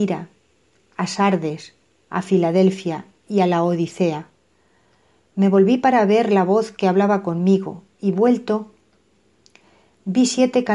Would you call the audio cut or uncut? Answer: uncut